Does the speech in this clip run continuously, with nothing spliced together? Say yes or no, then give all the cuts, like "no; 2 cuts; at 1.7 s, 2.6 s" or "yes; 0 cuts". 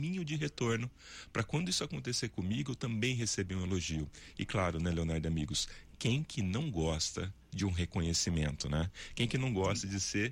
yes; 0 cuts